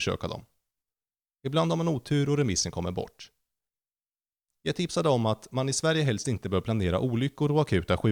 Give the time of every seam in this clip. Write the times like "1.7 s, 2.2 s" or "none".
none